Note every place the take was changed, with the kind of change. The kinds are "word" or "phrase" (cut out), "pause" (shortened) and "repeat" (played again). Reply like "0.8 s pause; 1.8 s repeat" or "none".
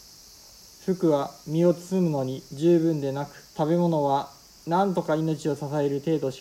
1.4 s pause; 2.5 s pause; 3.5 s pause